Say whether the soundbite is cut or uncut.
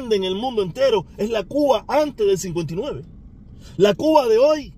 uncut